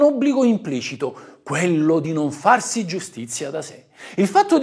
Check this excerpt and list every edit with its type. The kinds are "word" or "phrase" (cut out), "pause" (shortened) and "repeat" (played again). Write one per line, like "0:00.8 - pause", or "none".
none